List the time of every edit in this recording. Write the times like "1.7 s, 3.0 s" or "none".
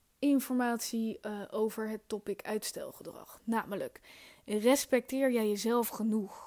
none